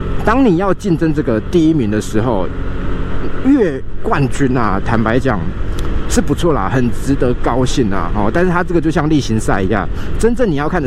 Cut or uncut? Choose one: uncut